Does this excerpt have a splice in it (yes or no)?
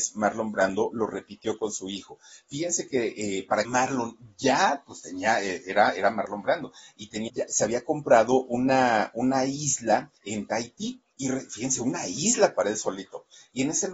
yes